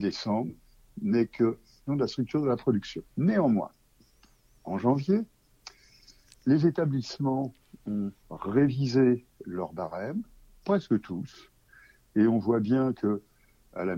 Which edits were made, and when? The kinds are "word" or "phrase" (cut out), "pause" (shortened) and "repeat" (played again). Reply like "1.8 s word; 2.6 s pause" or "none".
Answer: 1.9 s phrase; 3.1 s pause; 8.2 s pause